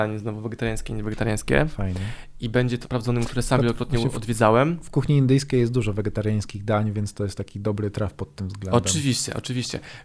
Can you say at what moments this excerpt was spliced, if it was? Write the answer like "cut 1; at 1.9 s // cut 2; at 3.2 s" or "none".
cut 1; at 2.8 s